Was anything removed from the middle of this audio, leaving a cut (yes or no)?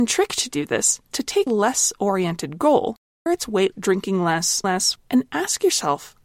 yes